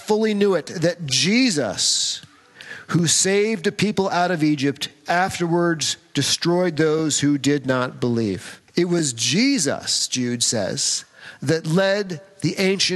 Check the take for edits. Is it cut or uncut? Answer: cut